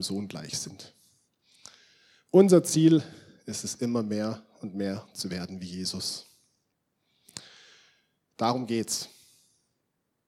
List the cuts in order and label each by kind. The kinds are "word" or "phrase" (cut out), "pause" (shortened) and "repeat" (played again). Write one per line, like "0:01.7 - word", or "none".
none